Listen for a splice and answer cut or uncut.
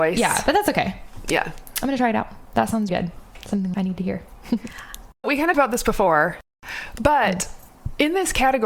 cut